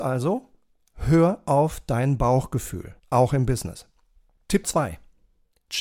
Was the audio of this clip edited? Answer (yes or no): yes